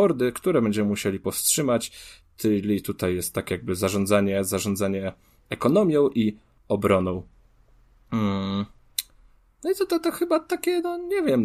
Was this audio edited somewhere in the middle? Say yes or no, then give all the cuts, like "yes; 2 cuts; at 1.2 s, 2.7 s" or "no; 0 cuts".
no; 0 cuts